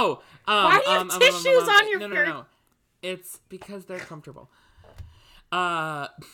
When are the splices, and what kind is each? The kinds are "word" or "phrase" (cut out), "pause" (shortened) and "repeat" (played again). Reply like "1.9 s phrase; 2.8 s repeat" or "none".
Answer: 2.1 s word